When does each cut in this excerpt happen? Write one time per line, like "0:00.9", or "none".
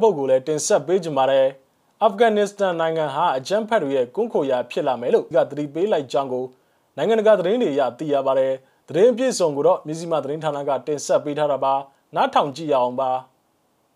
0:05.3